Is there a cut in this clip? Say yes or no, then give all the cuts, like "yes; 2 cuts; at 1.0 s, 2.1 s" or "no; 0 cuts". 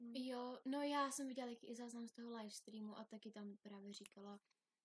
no; 0 cuts